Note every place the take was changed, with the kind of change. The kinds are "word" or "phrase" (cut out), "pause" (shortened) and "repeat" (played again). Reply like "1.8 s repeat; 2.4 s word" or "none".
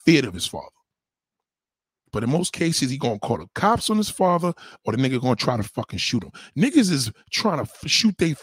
none